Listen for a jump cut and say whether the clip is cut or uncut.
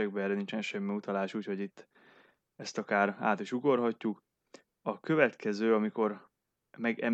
uncut